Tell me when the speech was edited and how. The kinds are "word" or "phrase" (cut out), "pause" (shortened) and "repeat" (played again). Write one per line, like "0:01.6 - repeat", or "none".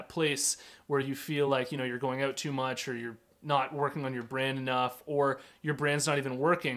none